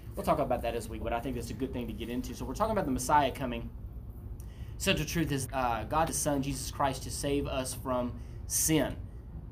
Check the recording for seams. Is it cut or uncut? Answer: cut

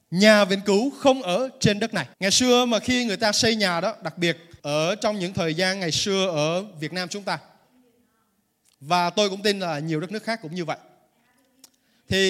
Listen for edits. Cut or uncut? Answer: cut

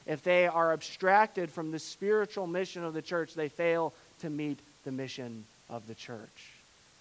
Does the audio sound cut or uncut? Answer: uncut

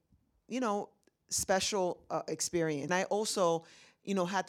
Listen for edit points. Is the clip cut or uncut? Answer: cut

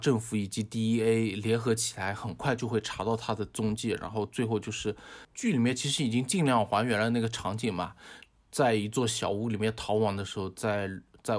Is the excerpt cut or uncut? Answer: uncut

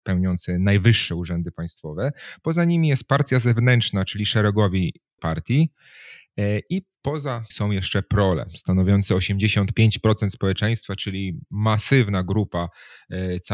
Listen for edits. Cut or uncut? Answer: cut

